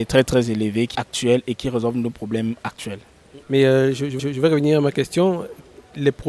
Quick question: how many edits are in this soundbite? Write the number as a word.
three